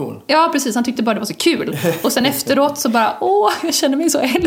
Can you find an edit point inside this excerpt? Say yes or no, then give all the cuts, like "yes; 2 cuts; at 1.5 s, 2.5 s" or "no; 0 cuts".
no; 0 cuts